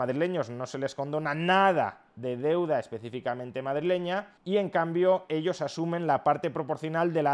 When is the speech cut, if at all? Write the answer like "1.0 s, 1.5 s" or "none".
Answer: 4.4 s